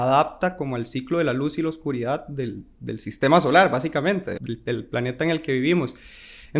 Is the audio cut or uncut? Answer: cut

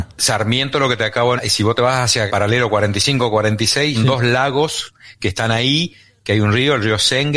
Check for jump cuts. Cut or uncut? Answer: cut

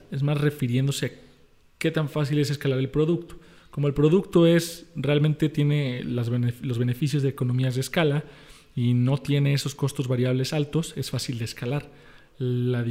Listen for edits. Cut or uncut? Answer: uncut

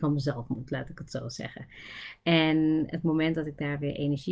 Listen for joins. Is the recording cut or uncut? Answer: uncut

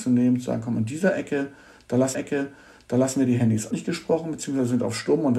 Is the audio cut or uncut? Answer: cut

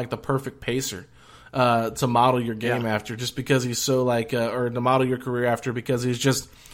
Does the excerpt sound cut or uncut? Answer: uncut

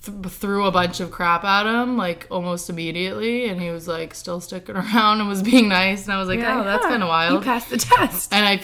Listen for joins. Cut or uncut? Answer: uncut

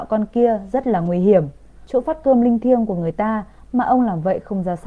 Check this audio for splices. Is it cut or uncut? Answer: uncut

